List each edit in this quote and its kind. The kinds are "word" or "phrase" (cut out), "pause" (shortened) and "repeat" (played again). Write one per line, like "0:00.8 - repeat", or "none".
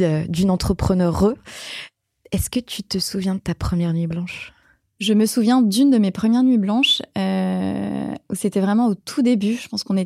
none

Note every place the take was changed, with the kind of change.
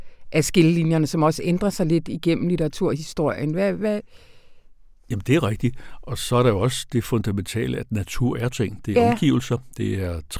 0:08.5 - word

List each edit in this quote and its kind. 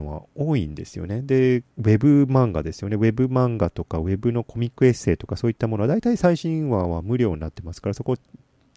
0:01.7 - pause

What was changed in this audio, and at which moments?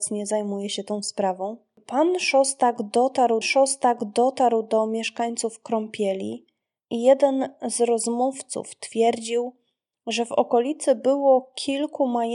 0:03.4 - repeat

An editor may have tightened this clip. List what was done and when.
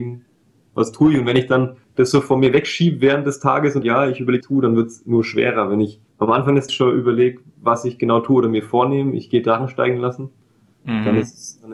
0:01.8 - pause
0:03.8 - phrase
0:04.4 - phrase
0:06.1 - pause
0:06.7 - word
0:07.5 - pause

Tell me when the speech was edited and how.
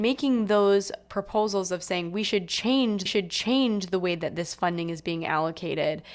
0:03.1 - repeat

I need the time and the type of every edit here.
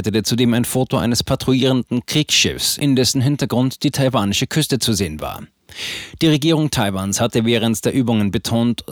none

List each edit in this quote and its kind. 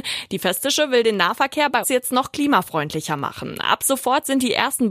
0:01.8 - word

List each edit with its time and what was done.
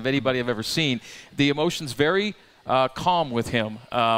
none

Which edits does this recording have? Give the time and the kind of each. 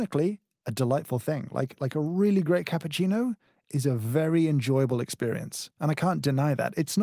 none

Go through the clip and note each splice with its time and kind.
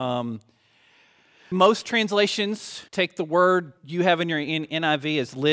0:01.5 - word
0:02.9 - pause
0:03.8 - pause

